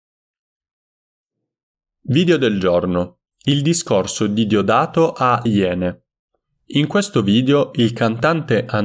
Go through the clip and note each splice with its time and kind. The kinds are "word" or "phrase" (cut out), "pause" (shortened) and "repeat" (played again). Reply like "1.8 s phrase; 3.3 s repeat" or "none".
3.3 s pause; 5.5 s word